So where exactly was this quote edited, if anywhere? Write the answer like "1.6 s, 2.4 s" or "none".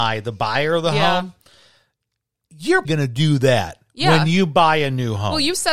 2.8 s